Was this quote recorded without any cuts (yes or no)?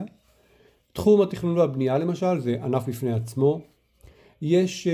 yes